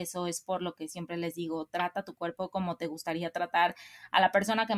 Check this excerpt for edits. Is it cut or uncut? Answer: uncut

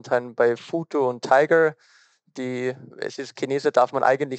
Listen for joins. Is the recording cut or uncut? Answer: cut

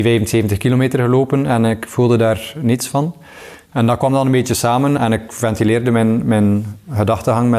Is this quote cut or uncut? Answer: cut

